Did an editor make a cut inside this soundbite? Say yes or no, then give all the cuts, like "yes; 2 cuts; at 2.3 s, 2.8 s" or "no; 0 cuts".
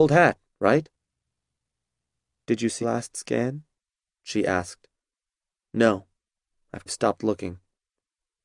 yes; 2 cuts; at 2.8 s, 6.9 s